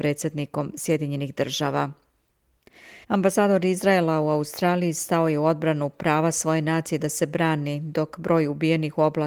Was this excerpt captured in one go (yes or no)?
no